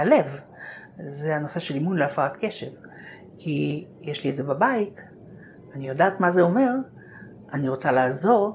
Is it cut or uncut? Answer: uncut